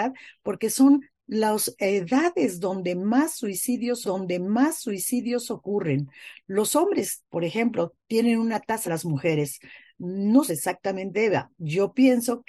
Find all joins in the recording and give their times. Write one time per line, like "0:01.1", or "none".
0:04.0
0:07.2
0:08.0
0:08.8
0:10.5
0:11.1